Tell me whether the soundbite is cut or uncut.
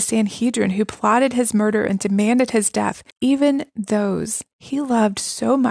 cut